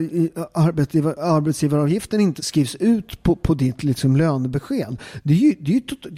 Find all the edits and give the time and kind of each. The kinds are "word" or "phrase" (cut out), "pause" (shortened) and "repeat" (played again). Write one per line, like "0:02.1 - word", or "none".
0:02.4 - word